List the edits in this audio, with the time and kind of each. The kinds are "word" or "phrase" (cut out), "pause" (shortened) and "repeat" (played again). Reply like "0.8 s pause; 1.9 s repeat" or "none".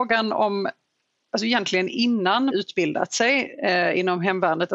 2.5 s phrase

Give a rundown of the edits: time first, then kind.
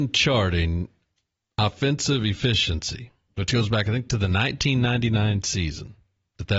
none

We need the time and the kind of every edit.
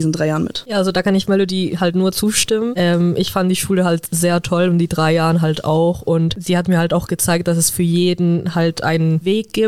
none

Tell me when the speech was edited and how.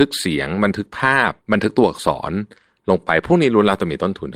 1.4 s pause

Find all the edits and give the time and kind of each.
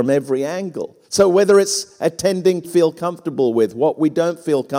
1.0 s pause; 2.6 s phrase

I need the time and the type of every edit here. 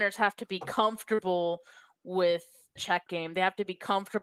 2.8 s word; 3.1 s word

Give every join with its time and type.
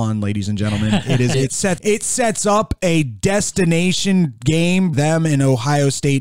1.3 s word; 1.8 s word; 4.9 s word

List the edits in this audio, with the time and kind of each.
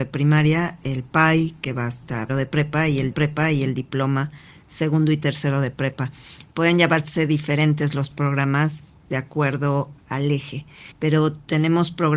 2.3 s word; 3.1 s repeat; 10.0 s word; 10.9 s pause

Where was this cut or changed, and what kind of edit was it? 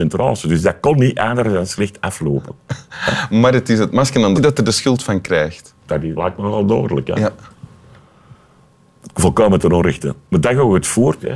4.4 s phrase; 6.2 s word

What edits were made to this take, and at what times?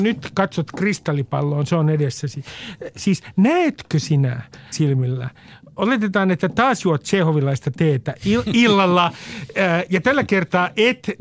4.7 s word

